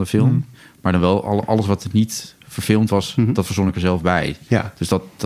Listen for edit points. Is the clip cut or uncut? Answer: uncut